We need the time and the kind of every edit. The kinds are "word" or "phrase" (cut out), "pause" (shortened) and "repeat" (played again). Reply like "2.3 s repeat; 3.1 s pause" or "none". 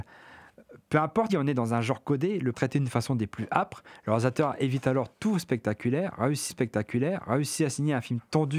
1.3 s word; 2.5 s word; 6.5 s repeat